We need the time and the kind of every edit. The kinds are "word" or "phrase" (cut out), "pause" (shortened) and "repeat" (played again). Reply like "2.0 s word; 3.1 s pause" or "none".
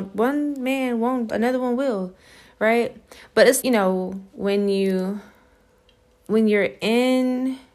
1.3 s word; 3.6 s word